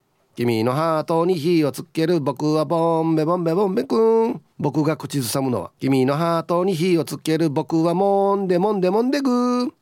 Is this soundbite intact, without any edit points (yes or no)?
no